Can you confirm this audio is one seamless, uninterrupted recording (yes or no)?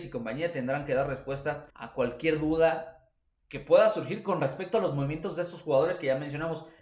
no